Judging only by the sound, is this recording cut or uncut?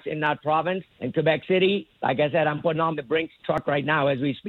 cut